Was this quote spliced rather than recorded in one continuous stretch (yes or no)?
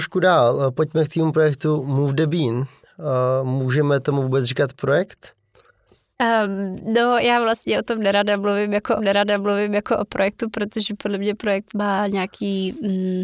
yes